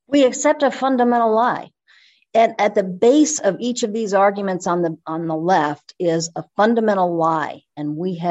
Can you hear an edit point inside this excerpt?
no; 0 cuts

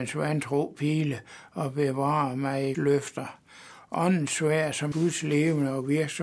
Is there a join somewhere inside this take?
yes; 2 cuts; at 2.7 s, 4.9 s

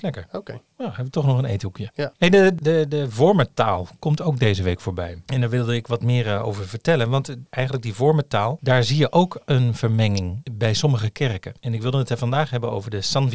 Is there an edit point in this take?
no; 0 cuts

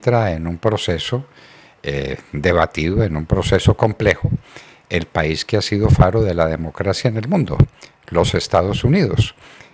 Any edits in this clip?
no; 0 cuts

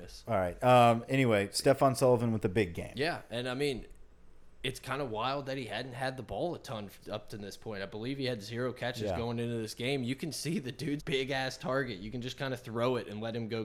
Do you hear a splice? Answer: yes; 1 cut; at 11.0 s

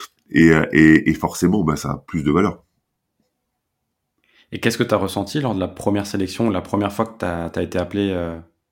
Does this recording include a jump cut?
no; 0 cuts

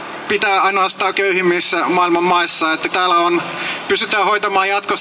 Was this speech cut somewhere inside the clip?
yes; 2 cuts; at 1.1 s, 2.9 s

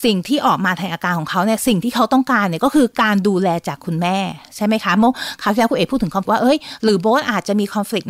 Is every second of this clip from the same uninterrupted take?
no; 1 cut; at 6.2 s

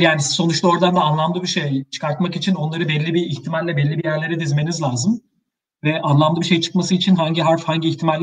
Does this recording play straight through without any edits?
yes; 0 cuts

